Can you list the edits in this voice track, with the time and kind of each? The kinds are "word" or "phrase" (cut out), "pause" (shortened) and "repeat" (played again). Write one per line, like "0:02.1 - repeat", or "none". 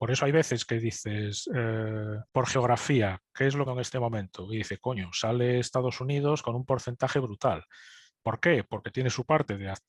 0:02.3 - pause
0:03.7 - phrase